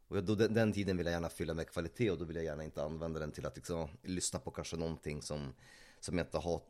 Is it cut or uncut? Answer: uncut